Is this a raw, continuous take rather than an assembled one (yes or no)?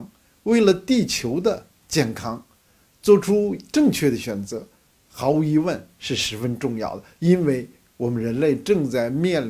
yes